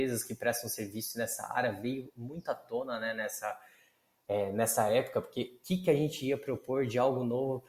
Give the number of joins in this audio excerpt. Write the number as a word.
zero